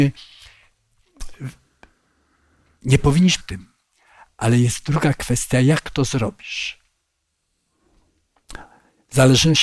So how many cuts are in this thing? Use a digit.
1